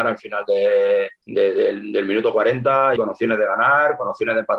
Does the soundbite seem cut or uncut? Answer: cut